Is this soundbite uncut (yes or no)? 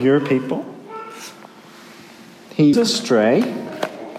no